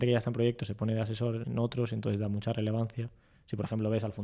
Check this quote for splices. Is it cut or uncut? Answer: cut